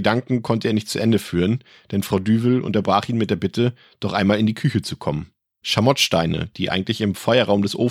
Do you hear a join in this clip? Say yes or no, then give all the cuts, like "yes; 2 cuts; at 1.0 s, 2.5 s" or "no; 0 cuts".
no; 0 cuts